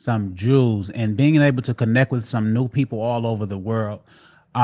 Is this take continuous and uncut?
yes; 0 cuts

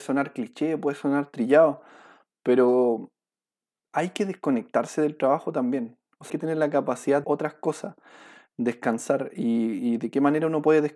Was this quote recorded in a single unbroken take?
no; 2 cuts; at 6.3 s, 7.2 s

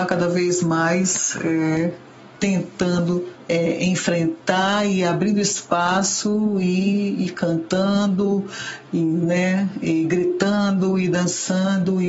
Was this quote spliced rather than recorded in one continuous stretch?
no; 0 cuts

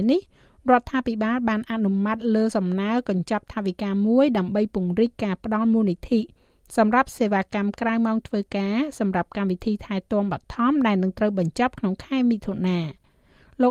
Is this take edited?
no; 0 cuts

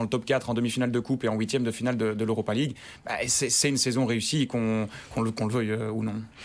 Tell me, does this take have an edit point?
no; 0 cuts

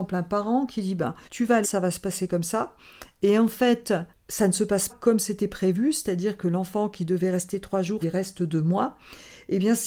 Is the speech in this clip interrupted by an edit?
yes; 5 cuts; at 1.3 s, 1.6 s, 4.1 s, 4.9 s, 8.0 s

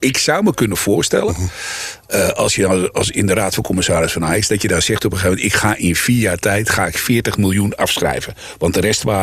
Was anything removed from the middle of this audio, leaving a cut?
no; 0 cuts

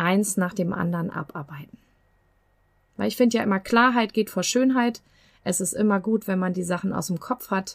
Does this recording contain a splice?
no; 0 cuts

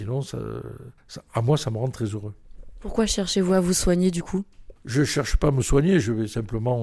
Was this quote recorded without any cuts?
no; 1 cut; at 1.0 s

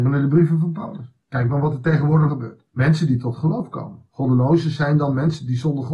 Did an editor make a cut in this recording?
yes; 4 cuts; at 1.2 s, 2.3 s, 2.7 s, 4.1 s

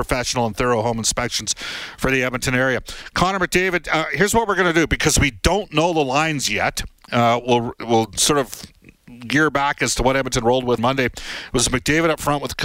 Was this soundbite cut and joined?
yes; 1 cut; at 10.8 s

